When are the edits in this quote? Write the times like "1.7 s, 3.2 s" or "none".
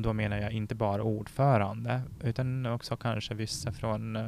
none